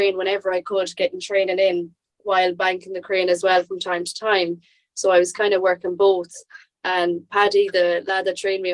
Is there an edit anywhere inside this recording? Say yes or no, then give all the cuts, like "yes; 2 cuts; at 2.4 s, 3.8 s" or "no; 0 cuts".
no; 0 cuts